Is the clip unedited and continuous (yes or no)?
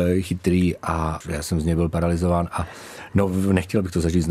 yes